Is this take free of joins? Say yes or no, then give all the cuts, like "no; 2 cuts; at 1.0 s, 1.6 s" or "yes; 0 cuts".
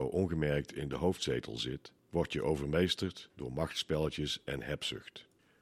yes; 0 cuts